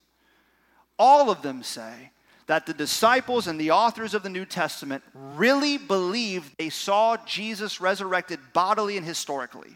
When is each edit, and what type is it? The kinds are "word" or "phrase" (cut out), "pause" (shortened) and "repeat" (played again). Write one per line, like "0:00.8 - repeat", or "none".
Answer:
none